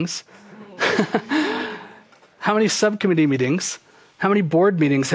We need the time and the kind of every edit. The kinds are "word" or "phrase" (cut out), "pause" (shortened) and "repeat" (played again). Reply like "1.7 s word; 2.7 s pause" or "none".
none